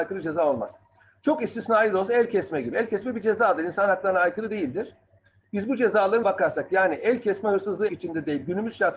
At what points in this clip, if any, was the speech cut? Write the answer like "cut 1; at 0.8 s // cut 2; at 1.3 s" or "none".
cut 1; at 6.2 s // cut 2; at 7.9 s